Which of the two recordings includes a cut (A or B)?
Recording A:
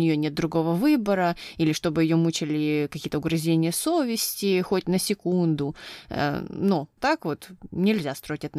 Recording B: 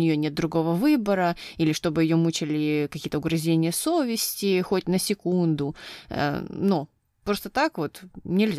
A